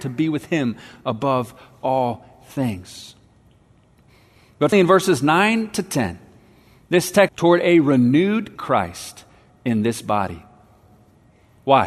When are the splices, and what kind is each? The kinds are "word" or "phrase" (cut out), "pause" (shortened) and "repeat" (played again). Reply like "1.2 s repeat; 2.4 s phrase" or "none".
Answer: 4.7 s word; 7.3 s phrase; 8.6 s phrase